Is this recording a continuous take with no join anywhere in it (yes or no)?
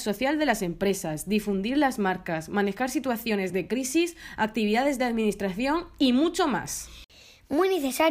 yes